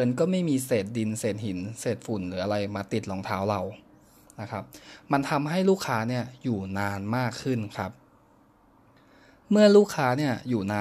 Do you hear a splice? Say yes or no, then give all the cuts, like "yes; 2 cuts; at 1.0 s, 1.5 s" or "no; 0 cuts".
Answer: no; 0 cuts